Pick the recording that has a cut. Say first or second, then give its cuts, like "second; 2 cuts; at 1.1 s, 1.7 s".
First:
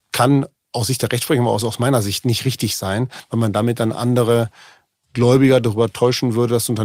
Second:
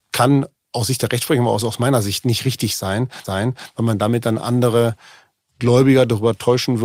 second; 1 cut; at 3.2 s